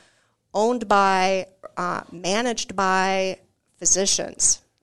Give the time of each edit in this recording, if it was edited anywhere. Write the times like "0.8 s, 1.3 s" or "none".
none